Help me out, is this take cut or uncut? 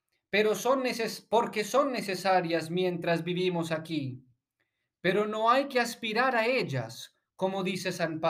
uncut